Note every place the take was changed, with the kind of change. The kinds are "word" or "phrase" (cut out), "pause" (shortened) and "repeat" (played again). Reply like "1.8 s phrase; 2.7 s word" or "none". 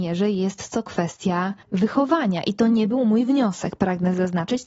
1.6 s pause